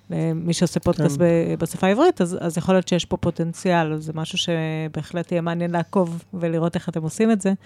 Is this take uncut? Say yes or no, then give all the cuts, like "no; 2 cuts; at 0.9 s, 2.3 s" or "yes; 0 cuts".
yes; 0 cuts